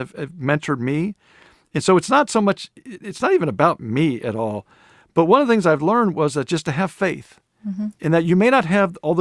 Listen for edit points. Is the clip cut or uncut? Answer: uncut